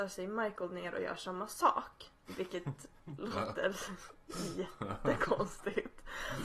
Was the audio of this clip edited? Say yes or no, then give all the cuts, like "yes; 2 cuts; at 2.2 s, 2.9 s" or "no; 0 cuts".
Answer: yes; 1 cut; at 2.2 s